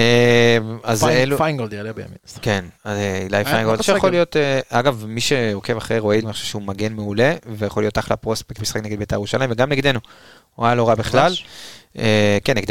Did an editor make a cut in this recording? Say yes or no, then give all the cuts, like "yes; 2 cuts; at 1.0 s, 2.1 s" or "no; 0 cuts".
yes; 4 cuts; at 2.8 s, 3.8 s, 6.2 s, 8.6 s